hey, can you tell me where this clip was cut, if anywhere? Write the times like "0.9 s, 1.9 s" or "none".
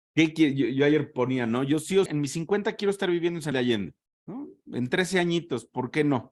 2.1 s, 3.5 s, 4.1 s